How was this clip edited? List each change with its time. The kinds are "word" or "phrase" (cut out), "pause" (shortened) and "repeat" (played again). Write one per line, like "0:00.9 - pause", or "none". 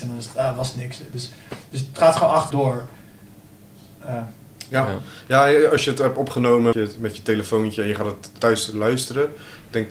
0:02.5 - word
0:06.7 - word
0:08.4 - word